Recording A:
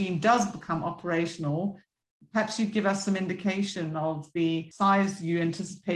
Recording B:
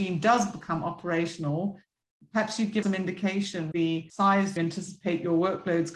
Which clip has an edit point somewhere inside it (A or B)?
B